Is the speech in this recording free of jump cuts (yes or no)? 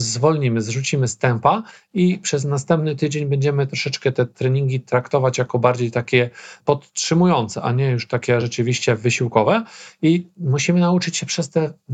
yes